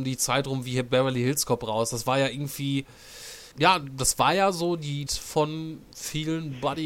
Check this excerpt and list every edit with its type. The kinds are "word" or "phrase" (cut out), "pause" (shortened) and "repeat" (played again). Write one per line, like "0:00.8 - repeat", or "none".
0:03.5 - pause
0:05.1 - phrase